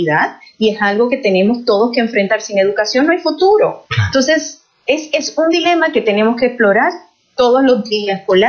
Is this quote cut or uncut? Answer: uncut